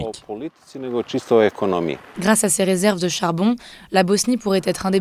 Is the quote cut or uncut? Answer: uncut